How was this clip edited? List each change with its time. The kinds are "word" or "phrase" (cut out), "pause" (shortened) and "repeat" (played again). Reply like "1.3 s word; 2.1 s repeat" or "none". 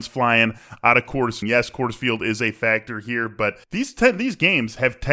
1.4 s phrase; 3.6 s pause